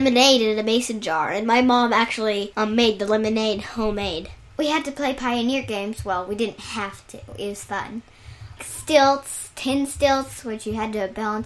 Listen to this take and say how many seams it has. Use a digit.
1